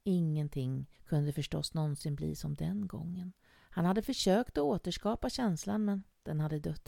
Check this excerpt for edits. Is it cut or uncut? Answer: cut